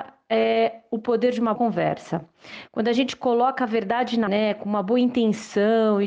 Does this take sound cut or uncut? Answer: cut